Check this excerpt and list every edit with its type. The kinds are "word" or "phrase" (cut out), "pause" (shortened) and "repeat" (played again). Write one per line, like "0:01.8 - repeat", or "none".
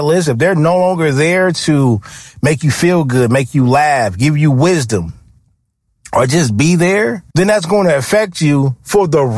0:07.3 - pause